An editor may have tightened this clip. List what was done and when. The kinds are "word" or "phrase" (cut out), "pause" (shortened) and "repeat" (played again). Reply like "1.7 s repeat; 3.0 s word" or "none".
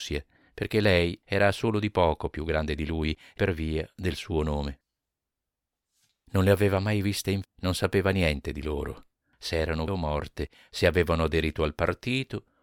3.4 s word; 7.4 s word; 9.9 s word